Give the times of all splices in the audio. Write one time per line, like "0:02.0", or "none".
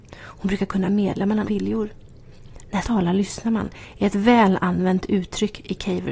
0:01.5
0:02.8